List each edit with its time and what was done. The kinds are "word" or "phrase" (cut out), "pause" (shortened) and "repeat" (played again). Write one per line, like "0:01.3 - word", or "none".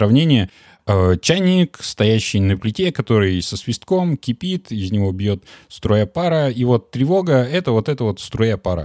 none